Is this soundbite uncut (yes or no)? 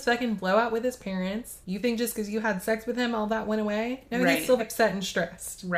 no